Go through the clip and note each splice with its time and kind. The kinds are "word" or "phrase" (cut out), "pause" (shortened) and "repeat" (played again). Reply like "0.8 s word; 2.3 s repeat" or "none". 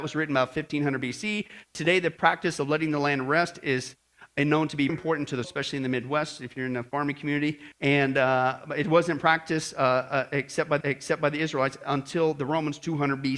4.9 s word; 5.4 s word; 7.7 s pause; 10.8 s repeat